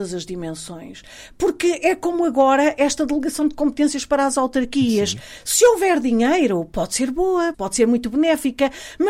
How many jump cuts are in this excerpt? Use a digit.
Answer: 1